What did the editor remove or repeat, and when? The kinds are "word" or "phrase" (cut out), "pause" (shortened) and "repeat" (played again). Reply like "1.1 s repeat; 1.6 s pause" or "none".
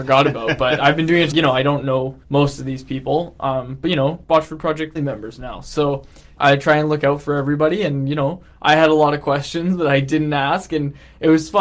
1.3 s word; 2.2 s pause; 4.2 s phrase; 4.9 s word; 6.4 s word

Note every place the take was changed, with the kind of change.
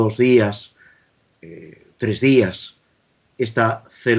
none

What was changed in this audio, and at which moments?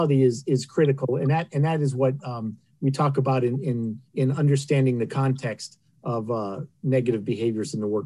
4.1 s pause

